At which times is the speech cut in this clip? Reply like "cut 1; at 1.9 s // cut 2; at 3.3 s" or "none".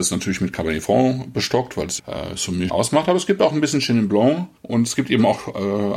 cut 1; at 2.0 s // cut 2; at 2.7 s // cut 3; at 4.6 s